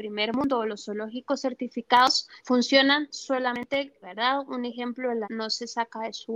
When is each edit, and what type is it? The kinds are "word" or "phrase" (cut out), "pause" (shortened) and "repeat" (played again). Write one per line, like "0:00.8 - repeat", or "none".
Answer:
0:02.4 - pause
0:04.0 - word
0:05.2 - word